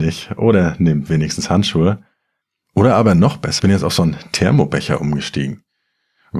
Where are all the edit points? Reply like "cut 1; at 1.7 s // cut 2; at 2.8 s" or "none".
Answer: cut 1; at 3.6 s